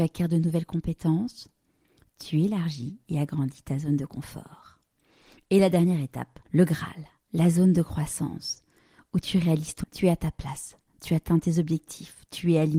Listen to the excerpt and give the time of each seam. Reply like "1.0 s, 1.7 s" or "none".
6.4 s, 9.8 s